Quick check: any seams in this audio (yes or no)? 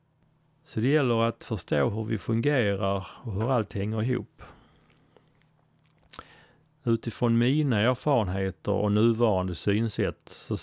no